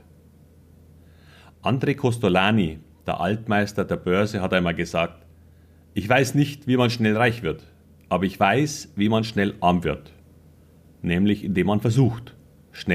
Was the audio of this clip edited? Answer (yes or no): no